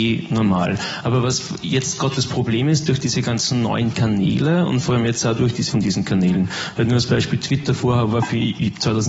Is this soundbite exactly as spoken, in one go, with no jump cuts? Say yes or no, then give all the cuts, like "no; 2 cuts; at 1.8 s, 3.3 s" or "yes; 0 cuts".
no; 1 cut; at 5.7 s